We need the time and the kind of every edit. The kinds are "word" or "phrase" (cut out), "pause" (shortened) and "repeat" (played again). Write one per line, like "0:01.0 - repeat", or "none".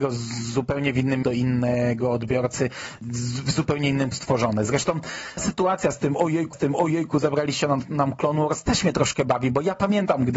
0:01.2 - phrase
0:04.1 - word
0:05.4 - word
0:06.5 - repeat